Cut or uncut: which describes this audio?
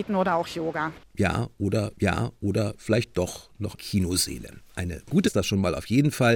cut